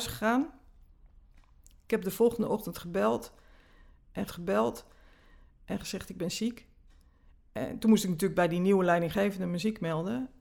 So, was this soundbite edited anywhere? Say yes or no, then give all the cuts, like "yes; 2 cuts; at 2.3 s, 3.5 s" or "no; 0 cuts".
yes; 1 cut; at 4.3 s